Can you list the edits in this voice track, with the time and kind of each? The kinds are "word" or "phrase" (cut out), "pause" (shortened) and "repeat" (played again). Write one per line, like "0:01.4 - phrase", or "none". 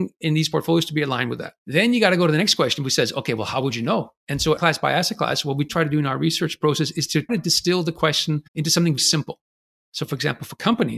0:01.6 - pause
0:04.2 - pause
0:04.6 - word
0:05.7 - word
0:07.3 - word
0:08.5 - pause
0:09.0 - word